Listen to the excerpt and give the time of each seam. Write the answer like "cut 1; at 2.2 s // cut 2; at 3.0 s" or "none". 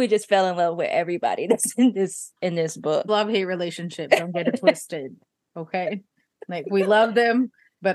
cut 1; at 3.1 s